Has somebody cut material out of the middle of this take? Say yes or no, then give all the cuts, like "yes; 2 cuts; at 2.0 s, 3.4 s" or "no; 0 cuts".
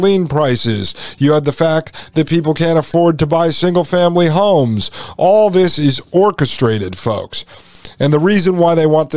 no; 0 cuts